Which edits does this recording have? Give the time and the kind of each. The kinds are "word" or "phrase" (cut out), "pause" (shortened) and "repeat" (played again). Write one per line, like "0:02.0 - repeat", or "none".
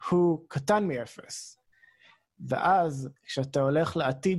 none